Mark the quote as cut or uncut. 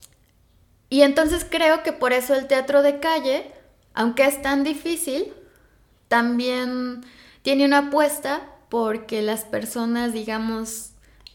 uncut